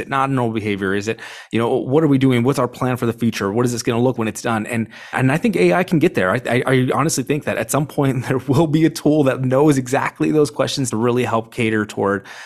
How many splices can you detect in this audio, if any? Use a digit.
3